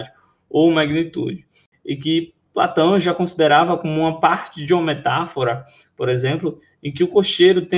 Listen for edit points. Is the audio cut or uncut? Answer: uncut